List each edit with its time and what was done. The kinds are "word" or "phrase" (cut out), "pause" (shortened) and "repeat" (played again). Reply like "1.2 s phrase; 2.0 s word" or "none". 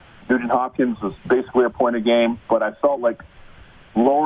none